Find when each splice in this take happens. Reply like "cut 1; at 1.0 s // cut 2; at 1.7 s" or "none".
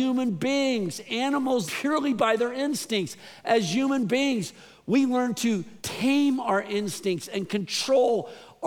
cut 1; at 1.7 s // cut 2; at 5.8 s